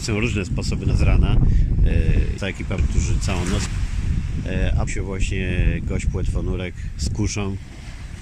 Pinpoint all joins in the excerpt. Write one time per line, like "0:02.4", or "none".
0:00.9
0:02.4
0:02.8
0:03.7
0:04.9